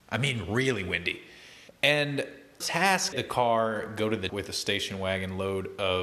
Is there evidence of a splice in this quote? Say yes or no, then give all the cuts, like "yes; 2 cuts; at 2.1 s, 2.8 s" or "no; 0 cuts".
yes; 4 cuts; at 1.7 s, 2.6 s, 3.1 s, 4.3 s